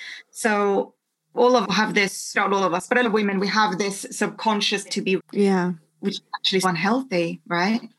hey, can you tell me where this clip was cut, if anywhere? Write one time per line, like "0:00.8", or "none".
0:01.6
0:02.3
0:03.0
0:04.8
0:05.2
0:06.6